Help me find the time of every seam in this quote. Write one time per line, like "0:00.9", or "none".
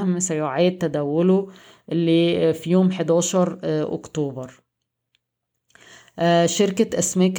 none